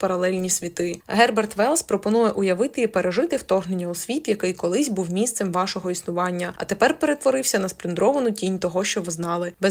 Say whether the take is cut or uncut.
uncut